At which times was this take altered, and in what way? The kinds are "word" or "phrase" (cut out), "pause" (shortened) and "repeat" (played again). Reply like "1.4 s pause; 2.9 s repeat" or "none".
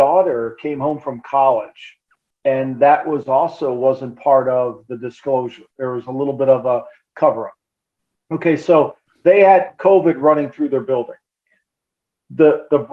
none